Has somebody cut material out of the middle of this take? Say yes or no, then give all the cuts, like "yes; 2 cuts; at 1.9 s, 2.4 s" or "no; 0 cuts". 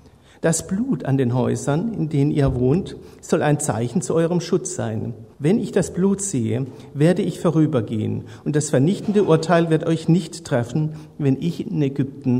yes; 1 cut; at 5.3 s